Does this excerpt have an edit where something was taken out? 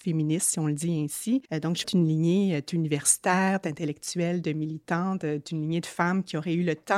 yes; 2 cuts; at 1.4 s, 1.8 s

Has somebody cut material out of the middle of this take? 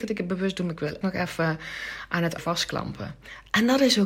yes; 2 cuts; at 1.0 s, 2.4 s

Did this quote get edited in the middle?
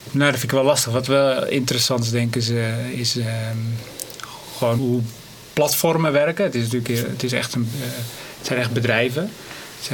yes; 1 cut; at 4.8 s

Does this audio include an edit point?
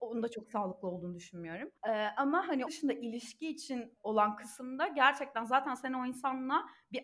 yes; 3 cuts; at 1.8 s, 2.7 s, 4.0 s

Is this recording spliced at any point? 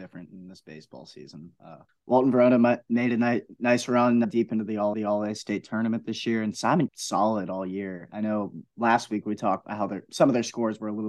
yes; 5 cuts; at 1.9 s, 4.2 s, 4.9 s, 6.9 s, 9.6 s

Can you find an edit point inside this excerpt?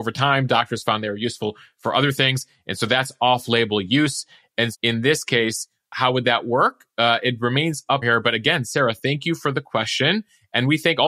yes; 2 cuts; at 4.7 s, 8.0 s

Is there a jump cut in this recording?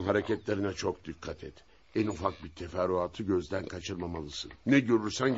no; 0 cuts

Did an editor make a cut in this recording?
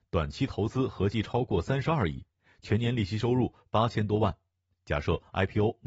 no; 0 cuts

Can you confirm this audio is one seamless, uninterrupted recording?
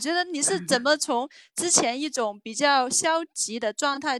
yes; 0 cuts

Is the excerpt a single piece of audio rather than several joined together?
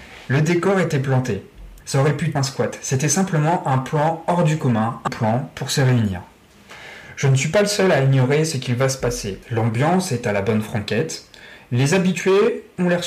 no; 4 cuts; at 1.8 s, 2.4 s, 5.1 s, 9.4 s

